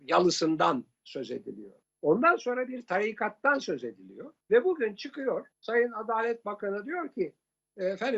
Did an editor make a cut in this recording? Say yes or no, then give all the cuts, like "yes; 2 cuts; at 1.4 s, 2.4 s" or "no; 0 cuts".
yes; 3 cuts; at 1.8 s, 4.4 s, 5.5 s